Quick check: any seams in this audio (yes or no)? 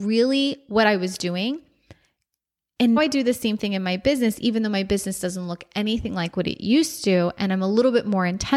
yes